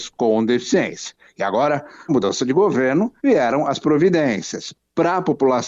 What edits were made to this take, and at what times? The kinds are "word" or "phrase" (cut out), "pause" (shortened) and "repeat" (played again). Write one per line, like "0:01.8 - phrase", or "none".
0:02.1 - phrase
0:03.2 - pause
0:03.8 - word